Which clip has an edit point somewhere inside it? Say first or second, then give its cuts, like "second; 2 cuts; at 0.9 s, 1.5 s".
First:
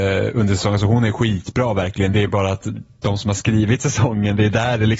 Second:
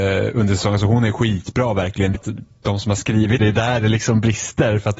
second; 2 cuts; at 2.1 s, 3.4 s